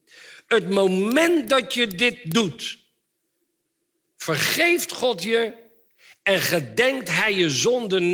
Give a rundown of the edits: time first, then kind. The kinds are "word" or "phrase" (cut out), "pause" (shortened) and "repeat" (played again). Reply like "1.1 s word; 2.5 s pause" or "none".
none